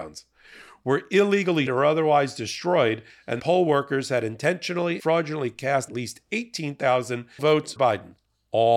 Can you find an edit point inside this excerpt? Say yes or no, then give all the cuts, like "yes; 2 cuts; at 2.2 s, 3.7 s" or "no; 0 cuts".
yes; 6 cuts; at 1.7 s, 3.4 s, 5.0 s, 5.9 s, 7.4 s, 7.8 s